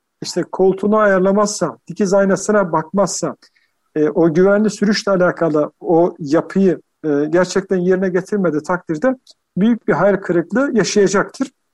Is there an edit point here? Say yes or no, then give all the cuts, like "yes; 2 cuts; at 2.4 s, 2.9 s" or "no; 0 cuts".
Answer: no; 0 cuts